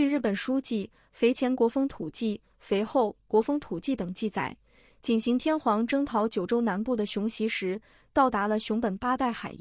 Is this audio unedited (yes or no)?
yes